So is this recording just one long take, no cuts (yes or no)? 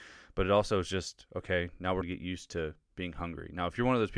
no